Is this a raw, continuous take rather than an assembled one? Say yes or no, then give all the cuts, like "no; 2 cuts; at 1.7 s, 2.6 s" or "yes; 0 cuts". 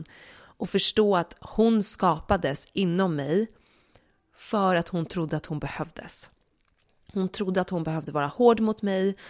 yes; 0 cuts